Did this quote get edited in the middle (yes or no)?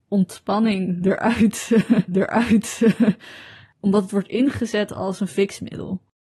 yes